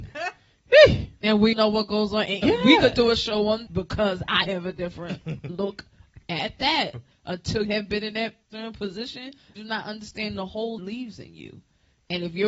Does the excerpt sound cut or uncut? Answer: cut